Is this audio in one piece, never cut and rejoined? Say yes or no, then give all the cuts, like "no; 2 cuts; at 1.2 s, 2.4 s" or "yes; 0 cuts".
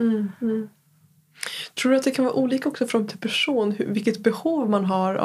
no; 1 cut; at 3.1 s